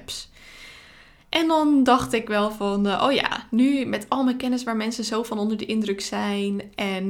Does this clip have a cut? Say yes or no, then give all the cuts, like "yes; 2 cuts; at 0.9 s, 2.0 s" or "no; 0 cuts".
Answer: no; 0 cuts